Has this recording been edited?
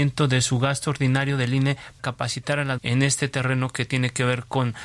yes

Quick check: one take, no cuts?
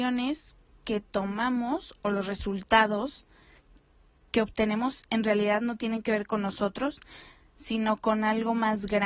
yes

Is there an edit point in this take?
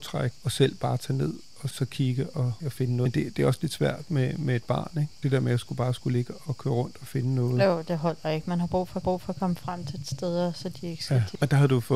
yes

